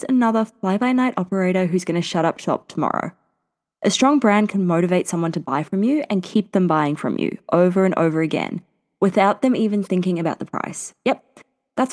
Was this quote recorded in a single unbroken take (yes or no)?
yes